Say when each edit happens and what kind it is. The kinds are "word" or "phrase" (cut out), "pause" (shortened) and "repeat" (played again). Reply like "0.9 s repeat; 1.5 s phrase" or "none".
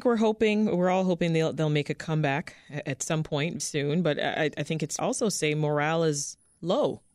3.6 s word; 5.0 s phrase